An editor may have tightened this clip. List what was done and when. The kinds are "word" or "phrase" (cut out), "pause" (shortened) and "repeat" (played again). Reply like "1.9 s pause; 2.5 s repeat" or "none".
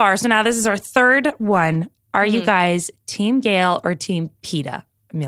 none